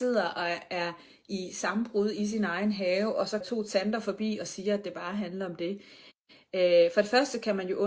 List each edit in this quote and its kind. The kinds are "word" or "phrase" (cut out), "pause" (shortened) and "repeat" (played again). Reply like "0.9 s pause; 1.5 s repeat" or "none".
3.4 s phrase